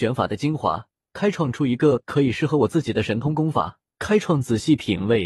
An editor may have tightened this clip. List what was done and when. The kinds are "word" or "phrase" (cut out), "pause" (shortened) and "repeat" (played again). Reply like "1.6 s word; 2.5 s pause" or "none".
1.0 s pause; 3.9 s pause

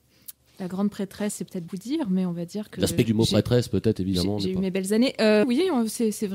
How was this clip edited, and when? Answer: 1.7 s word; 3.1 s word; 5.4 s phrase

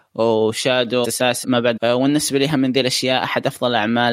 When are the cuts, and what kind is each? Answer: 1.0 s word; 1.4 s word; 1.8 s word

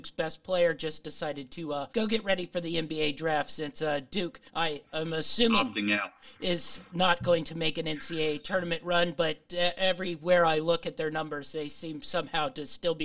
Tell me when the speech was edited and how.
1.9 s pause; 4.5 s pause

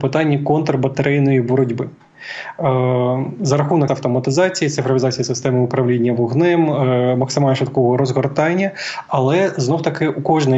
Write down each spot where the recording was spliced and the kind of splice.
3.9 s word

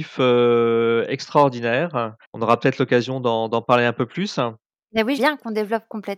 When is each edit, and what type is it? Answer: 2.2 s pause; 5.2 s word

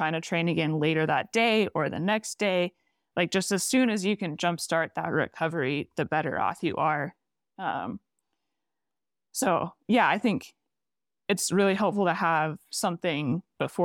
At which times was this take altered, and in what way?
none

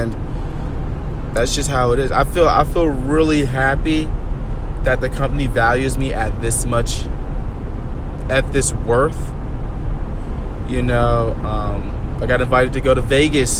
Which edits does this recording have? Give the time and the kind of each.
none

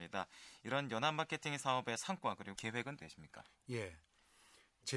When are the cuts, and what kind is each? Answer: 2.5 s word; 3.0 s word

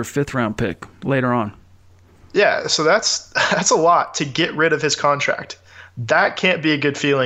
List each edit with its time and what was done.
none

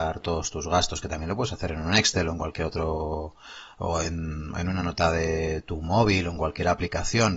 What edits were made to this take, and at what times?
none

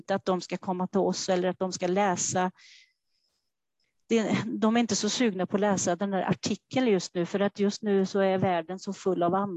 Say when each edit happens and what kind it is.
none

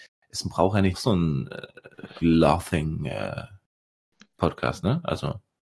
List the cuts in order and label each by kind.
0.9 s word; 2.2 s word

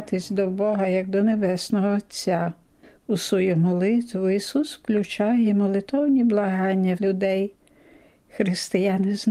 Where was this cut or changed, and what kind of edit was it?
7.0 s word

